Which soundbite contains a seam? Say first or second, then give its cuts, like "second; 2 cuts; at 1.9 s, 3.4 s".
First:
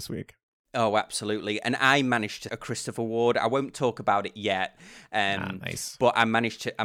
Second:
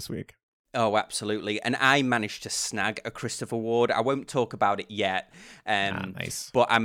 first; 1 cut; at 2.5 s